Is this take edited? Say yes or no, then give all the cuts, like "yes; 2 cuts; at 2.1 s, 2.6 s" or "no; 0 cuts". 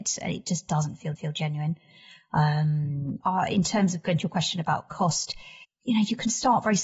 yes; 3 cuts; at 1.2 s, 3.2 s, 5.6 s